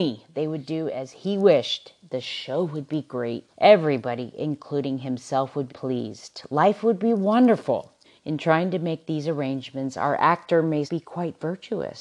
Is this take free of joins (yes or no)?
no